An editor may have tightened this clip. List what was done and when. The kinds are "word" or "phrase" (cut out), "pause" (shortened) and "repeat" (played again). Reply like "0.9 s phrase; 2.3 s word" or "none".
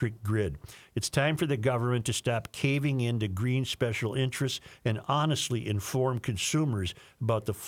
none